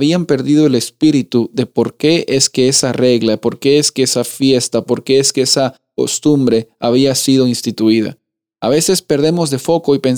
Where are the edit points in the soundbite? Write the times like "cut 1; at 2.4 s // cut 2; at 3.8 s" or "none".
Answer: none